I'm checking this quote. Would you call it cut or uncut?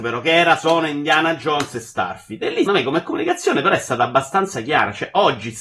cut